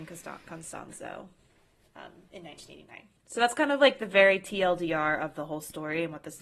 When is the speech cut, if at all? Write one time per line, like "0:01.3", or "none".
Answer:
0:03.2

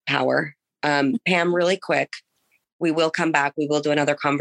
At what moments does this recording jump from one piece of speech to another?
none

